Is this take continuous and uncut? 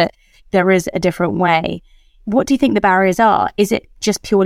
yes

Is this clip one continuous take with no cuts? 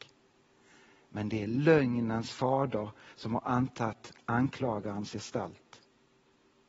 yes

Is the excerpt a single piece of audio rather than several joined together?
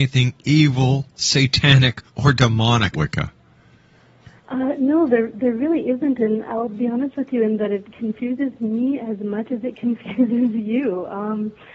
no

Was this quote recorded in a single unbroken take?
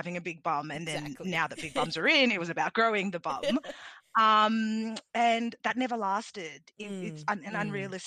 yes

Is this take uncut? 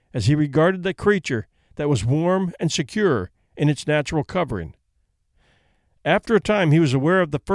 yes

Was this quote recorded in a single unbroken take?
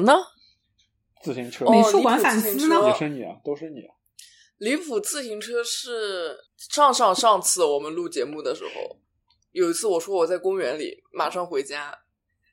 no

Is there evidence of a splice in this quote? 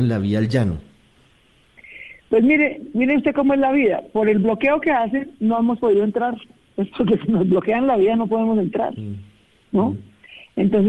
no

